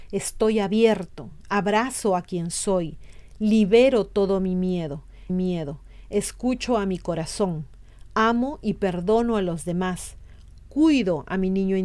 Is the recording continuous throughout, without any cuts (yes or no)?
no